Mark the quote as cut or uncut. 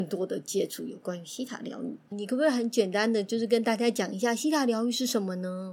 cut